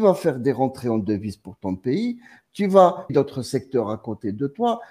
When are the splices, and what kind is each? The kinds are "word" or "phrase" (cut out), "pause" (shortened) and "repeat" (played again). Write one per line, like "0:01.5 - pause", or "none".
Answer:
0:03.1 - word